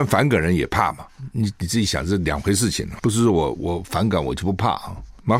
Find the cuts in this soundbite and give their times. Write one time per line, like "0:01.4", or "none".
0:03.0